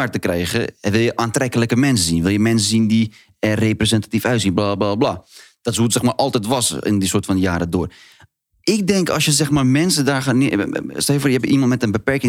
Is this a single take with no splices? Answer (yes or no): yes